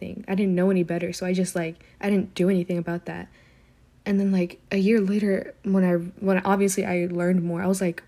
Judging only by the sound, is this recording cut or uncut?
uncut